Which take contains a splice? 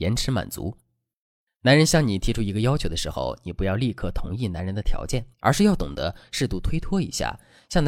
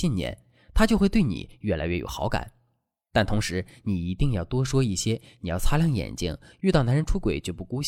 first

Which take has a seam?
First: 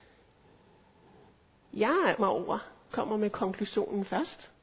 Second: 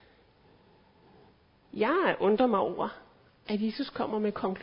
first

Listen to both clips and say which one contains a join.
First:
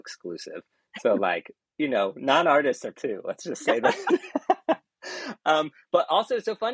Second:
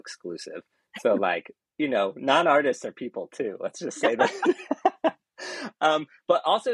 first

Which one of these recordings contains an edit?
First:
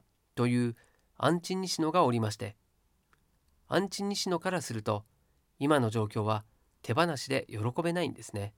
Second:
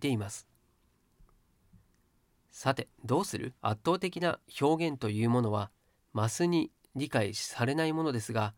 second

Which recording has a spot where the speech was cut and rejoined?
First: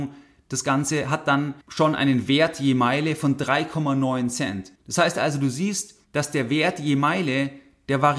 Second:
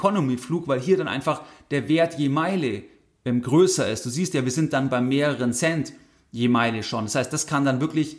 first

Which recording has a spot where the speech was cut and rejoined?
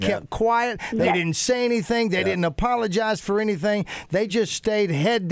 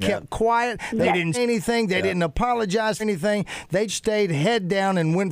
second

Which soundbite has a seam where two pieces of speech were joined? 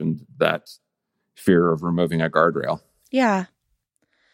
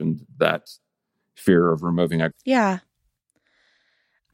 second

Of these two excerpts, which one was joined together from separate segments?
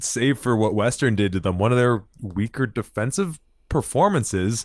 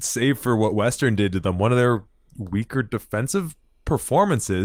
first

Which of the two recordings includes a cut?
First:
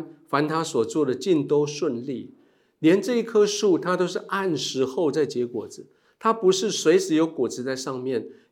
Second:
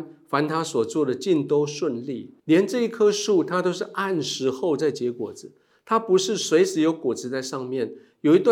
second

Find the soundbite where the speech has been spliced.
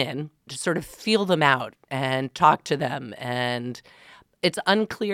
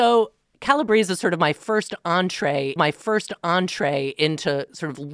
second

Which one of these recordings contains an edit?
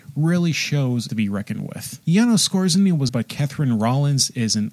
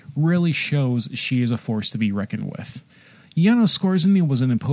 first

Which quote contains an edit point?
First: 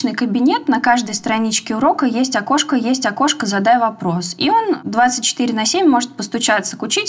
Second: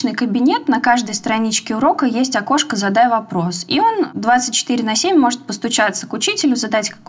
first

